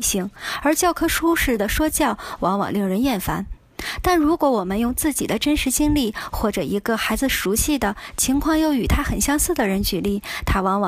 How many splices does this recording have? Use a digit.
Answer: 0